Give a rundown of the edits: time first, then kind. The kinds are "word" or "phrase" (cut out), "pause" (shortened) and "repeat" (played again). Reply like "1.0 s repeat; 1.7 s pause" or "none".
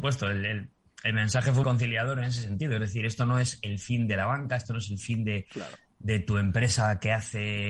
1.6 s word